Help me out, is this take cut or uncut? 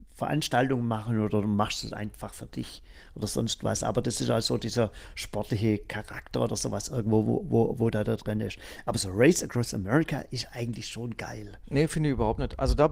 uncut